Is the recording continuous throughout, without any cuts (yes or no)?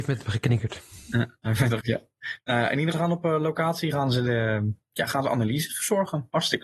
no